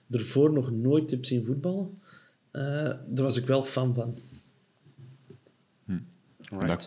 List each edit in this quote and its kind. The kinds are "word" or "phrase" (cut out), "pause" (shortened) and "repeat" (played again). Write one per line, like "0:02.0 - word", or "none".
none